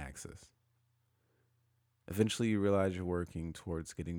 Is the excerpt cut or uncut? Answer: uncut